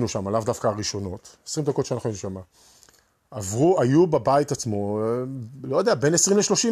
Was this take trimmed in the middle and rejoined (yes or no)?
no